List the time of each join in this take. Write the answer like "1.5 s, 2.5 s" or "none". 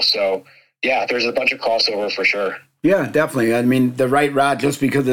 none